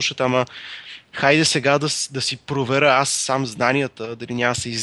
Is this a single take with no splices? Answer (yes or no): yes